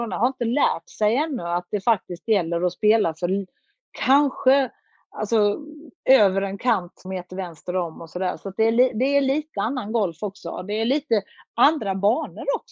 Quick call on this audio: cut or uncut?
cut